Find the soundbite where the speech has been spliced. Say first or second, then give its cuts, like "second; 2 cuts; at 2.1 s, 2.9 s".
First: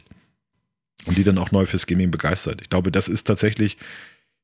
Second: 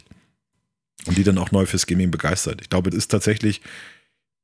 second; 1 cut; at 2.9 s